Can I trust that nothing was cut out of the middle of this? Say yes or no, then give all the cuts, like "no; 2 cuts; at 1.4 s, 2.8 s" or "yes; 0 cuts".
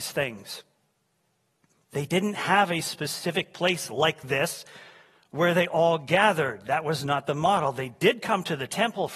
yes; 0 cuts